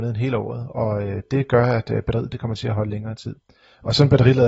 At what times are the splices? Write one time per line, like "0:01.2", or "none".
none